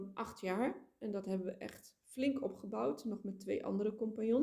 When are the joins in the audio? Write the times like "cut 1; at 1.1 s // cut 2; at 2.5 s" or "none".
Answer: none